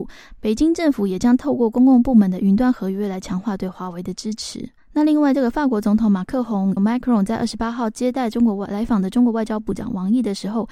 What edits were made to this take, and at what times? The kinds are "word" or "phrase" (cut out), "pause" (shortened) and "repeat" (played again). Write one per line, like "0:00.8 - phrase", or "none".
0:04.8 - pause
0:06.8 - word